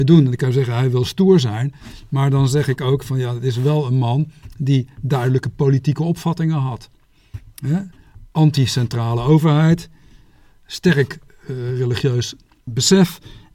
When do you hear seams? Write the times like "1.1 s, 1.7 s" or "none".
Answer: none